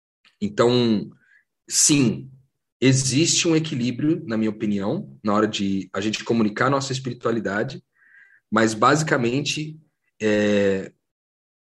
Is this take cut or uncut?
uncut